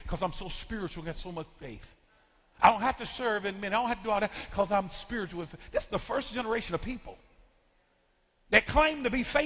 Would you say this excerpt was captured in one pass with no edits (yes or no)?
yes